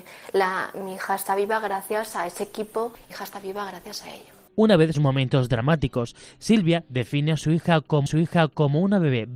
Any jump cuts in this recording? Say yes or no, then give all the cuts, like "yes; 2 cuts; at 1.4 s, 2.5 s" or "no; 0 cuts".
yes; 4 cuts; at 3.1 s, 4.5 s, 4.9 s, 8.1 s